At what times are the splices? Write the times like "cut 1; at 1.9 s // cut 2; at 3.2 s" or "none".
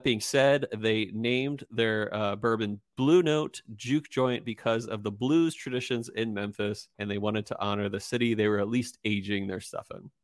cut 1; at 2.9 s // cut 2; at 6.9 s